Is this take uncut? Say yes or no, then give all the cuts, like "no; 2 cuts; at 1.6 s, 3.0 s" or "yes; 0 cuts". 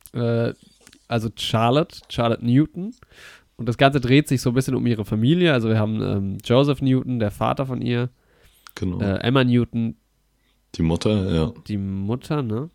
yes; 0 cuts